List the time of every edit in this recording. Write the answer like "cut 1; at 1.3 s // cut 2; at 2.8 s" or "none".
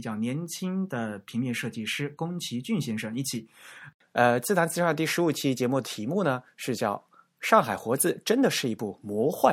none